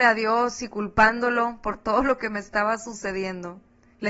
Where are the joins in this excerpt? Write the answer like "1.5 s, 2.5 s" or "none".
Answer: none